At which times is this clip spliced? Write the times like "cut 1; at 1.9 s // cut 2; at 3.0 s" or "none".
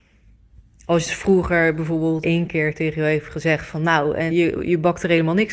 cut 1; at 2.2 s // cut 2; at 4.3 s